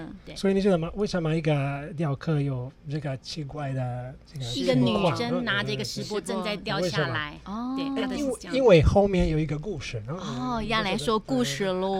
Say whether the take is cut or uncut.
uncut